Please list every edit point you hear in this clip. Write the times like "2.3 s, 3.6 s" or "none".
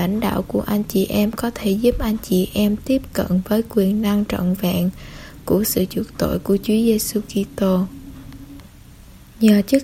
none